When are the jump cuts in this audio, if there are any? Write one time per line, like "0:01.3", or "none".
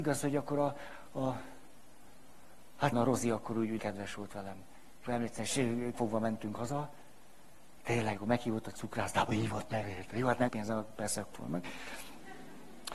0:02.9
0:03.8
0:05.1
0:05.9
0:08.2
0:09.3
0:09.8
0:10.5
0:11.3

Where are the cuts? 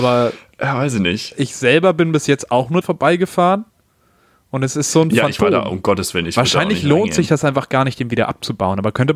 0:02.8

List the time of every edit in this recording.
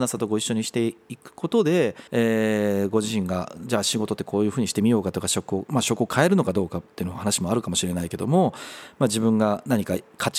0:02.1

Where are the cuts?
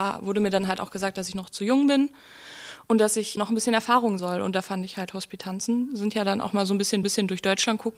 0:03.4
0:04.2
0:07.0

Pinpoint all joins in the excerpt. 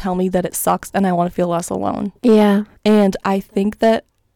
0:02.2

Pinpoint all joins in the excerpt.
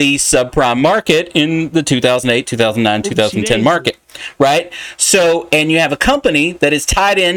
none

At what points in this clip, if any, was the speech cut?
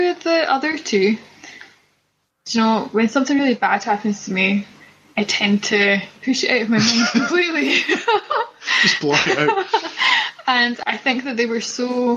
none

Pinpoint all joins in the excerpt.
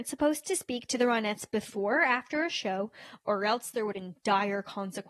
0:03.9

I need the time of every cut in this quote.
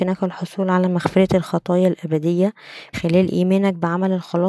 0:02.9

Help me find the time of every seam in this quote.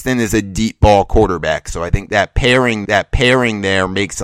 0:02.8

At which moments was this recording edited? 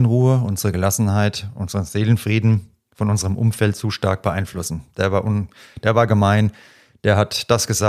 none

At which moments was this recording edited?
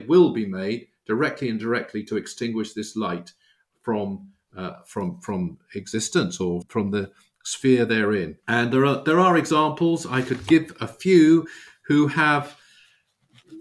0:06.6

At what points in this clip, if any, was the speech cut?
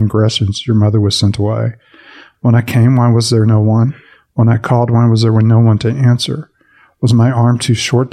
none

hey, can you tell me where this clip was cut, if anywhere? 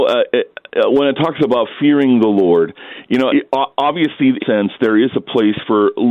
0:03.3
0:04.4

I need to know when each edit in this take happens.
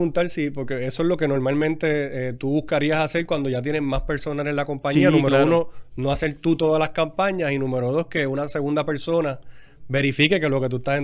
none

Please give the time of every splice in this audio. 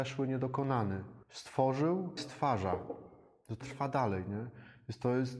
0:01.2
0:02.2
0:03.6

